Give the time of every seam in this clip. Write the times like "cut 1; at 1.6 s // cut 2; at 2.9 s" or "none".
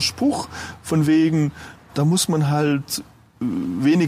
cut 1; at 1.9 s